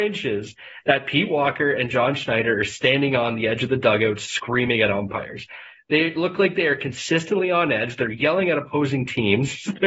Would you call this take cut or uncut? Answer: uncut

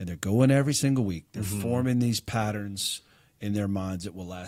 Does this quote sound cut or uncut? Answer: uncut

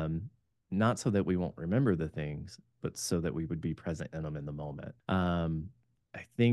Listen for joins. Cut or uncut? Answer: cut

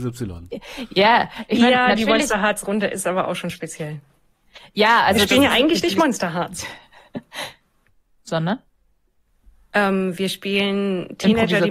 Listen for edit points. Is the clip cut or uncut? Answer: uncut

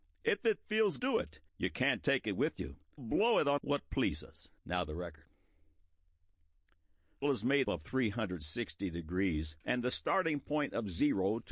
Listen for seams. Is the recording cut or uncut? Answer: cut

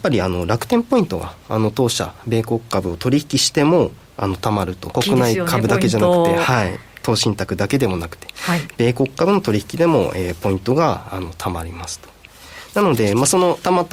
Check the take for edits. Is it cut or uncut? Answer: cut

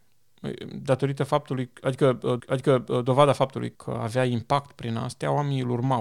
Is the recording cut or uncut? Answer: cut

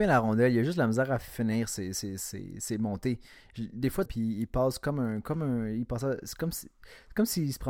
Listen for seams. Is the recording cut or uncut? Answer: cut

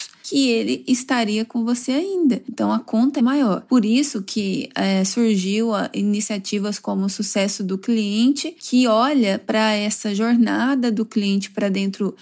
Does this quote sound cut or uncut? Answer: cut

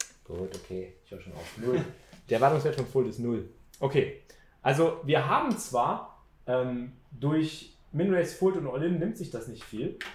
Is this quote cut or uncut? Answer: uncut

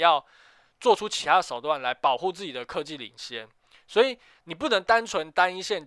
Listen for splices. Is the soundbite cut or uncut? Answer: uncut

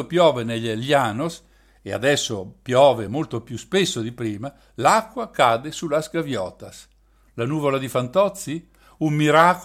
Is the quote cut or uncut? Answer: uncut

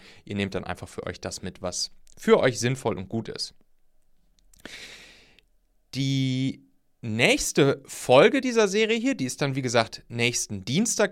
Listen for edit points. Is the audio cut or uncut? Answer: uncut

